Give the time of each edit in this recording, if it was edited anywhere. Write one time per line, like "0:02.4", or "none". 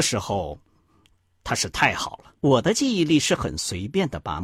0:02.4